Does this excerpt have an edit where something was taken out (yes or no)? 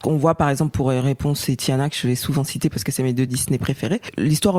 no